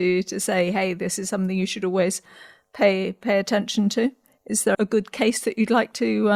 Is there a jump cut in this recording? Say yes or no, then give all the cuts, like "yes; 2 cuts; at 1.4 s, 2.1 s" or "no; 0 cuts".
yes; 1 cut; at 4.7 s